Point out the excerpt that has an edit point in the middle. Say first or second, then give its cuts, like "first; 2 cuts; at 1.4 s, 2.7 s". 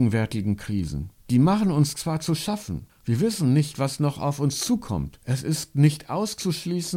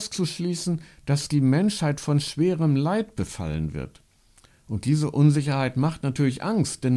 first; 3 cuts; at 1.2 s, 2.9 s, 5.2 s